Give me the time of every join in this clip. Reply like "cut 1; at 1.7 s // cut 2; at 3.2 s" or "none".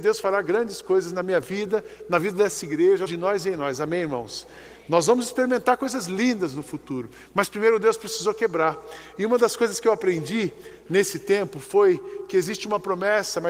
cut 1; at 3.1 s